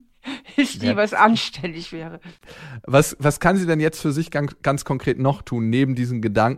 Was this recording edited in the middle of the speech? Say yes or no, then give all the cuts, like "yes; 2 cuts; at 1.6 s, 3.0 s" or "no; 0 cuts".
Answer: no; 0 cuts